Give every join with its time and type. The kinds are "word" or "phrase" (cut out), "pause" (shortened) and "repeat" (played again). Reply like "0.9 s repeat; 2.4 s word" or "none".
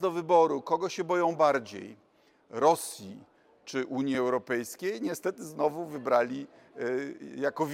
none